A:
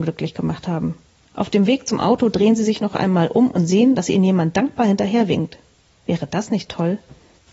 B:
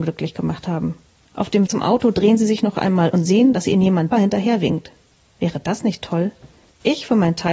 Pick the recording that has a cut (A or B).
B